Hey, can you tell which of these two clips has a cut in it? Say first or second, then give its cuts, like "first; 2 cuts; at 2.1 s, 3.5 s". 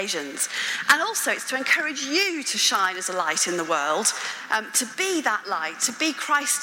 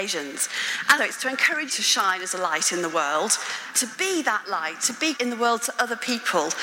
second; 4 cuts; at 1.0 s, 1.7 s, 3.7 s, 5.2 s